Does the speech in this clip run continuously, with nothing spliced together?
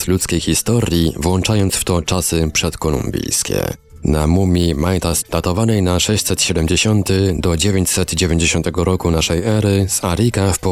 no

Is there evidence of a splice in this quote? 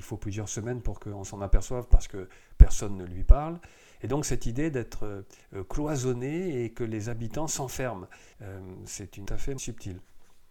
yes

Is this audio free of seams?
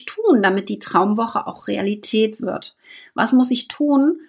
yes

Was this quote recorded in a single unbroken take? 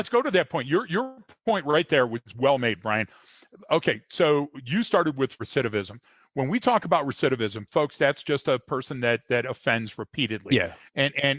yes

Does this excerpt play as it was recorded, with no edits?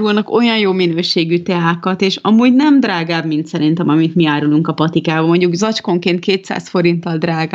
yes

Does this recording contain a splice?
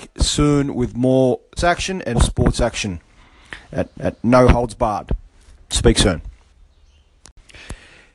yes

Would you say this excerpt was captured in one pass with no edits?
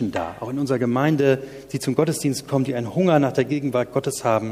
yes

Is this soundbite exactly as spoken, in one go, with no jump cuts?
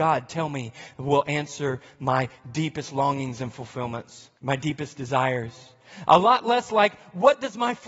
no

